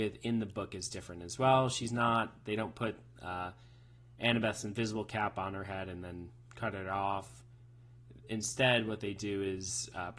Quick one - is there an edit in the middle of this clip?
no; 0 cuts

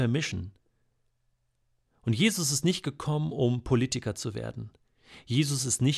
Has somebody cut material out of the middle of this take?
no; 0 cuts

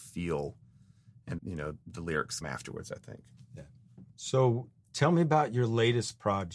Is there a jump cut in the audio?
yes; 4 cuts; at 1.4 s, 1.8 s, 2.4 s, 4.1 s

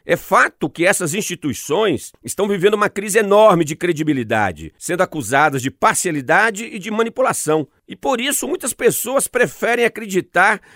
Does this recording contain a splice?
no; 0 cuts

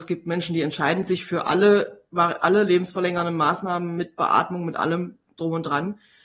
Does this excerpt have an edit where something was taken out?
no; 0 cuts

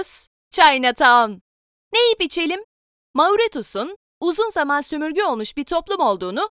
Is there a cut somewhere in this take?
no; 0 cuts

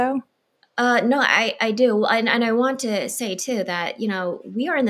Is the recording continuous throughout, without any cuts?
yes; 0 cuts

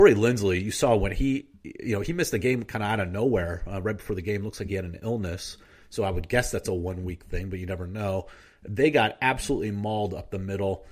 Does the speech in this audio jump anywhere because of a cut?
no; 0 cuts

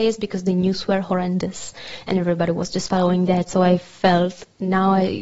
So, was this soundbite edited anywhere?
no; 0 cuts

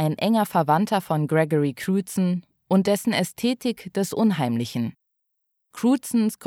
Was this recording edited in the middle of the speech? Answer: no; 0 cuts

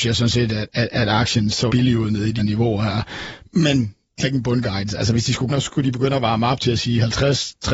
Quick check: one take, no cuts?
no; 4 cuts; at 1.7 s, 2.4 s, 4.2 s, 5.5 s

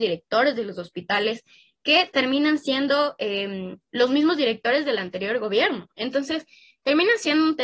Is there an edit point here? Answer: no; 0 cuts

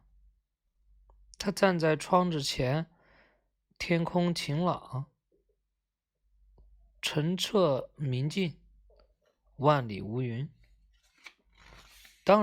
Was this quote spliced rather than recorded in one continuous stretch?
no; 0 cuts

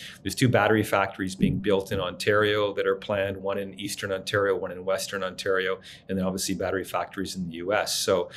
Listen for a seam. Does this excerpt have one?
no; 0 cuts

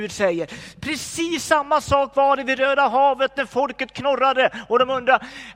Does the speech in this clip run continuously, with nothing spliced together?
yes; 0 cuts

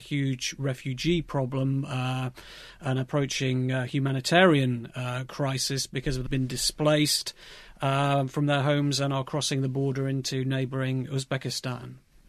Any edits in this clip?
yes; 1 cut; at 6.3 s

